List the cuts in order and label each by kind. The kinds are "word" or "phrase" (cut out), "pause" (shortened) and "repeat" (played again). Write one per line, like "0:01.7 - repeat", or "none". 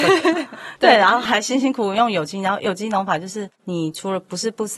0:03.5 - pause